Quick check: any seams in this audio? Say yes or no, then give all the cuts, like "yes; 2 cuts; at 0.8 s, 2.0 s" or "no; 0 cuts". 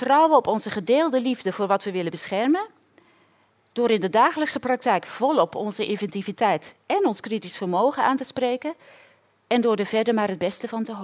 no; 0 cuts